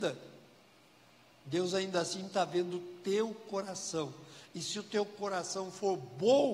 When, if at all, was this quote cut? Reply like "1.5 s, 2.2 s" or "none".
none